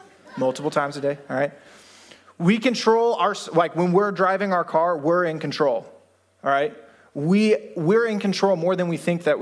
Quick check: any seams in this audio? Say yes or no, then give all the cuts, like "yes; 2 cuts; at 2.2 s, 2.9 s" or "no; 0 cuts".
no; 0 cuts